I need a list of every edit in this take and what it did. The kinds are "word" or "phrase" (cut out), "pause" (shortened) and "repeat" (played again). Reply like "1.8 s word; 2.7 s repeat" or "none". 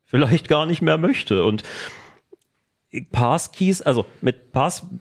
3.1 s word